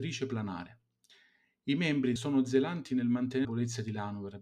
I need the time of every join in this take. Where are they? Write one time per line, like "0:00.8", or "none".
0:02.2
0:03.4